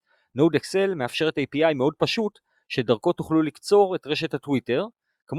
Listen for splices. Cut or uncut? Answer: uncut